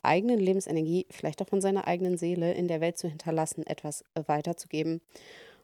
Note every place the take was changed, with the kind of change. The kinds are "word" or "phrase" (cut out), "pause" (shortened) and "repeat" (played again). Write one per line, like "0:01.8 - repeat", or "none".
none

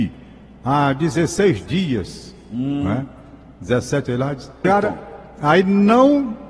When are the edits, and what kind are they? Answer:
0:04.1 - word
0:04.6 - word
0:05.3 - pause

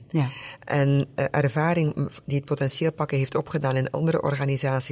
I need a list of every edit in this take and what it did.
none

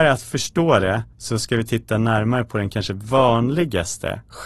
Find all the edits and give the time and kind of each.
0:01.1 - pause

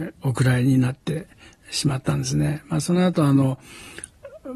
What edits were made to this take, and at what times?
none

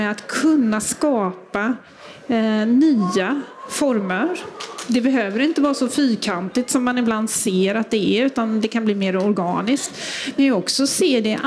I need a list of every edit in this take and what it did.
0:10.4 - phrase

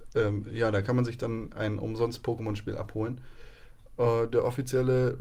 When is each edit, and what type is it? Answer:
none

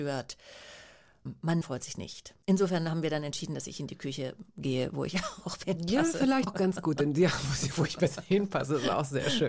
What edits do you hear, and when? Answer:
0:01.6 - word
0:02.4 - pause
0:05.6 - word
0:06.5 - word

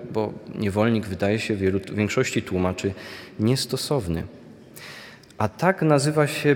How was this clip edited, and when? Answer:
none

